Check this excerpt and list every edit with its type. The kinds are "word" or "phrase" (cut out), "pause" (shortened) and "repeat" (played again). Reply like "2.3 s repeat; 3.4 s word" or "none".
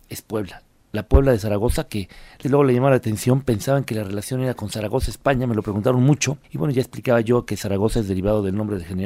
2.4 s word; 6.4 s pause